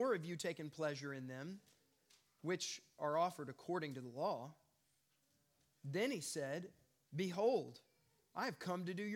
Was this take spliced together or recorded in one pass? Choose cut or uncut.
uncut